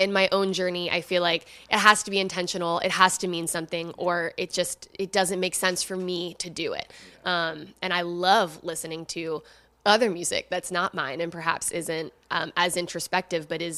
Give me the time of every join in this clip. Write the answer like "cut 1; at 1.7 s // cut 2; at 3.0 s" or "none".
none